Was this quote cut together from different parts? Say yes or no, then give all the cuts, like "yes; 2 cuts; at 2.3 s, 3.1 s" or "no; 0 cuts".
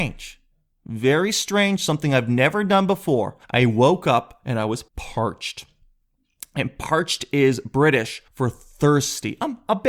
yes; 3 cuts; at 3.4 s, 4.9 s, 8.3 s